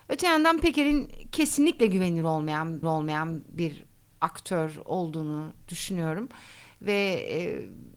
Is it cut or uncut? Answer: cut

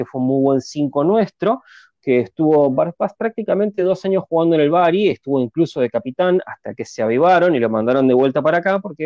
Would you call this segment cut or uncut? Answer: uncut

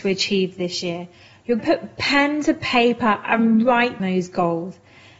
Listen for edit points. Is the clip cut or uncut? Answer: cut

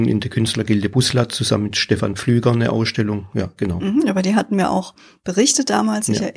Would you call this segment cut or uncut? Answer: uncut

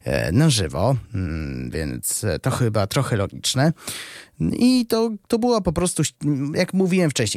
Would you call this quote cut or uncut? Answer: uncut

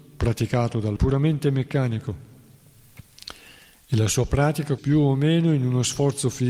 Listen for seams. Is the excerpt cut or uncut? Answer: cut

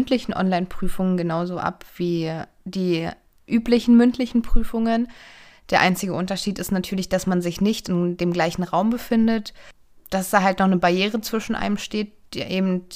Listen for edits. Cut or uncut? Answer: uncut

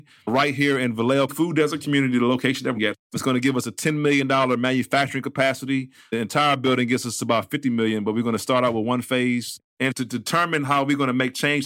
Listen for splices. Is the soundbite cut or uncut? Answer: cut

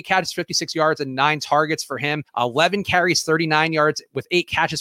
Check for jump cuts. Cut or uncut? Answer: cut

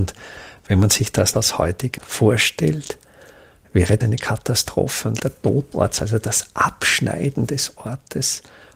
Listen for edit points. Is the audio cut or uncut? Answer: cut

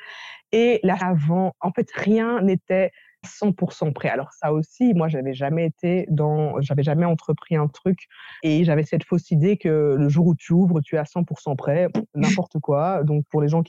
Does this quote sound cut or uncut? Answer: cut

